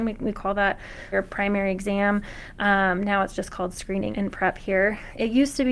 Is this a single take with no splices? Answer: no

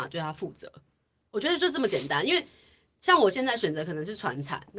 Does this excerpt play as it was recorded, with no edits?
yes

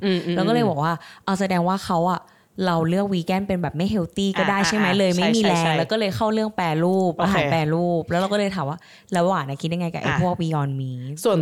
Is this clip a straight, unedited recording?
yes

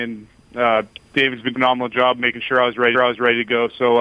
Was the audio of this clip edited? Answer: yes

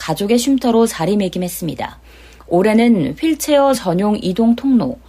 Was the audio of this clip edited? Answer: no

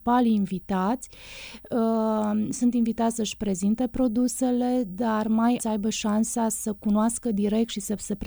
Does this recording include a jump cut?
yes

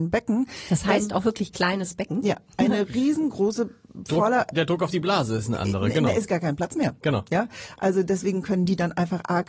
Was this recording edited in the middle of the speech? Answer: no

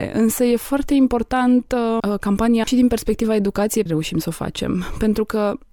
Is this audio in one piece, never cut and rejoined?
no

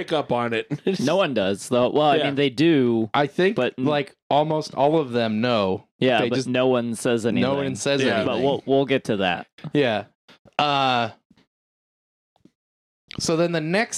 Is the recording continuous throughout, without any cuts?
yes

